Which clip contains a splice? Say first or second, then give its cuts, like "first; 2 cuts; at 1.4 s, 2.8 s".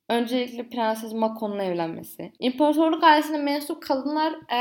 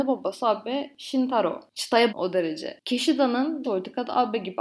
second; 2 cuts; at 2.1 s, 3.6 s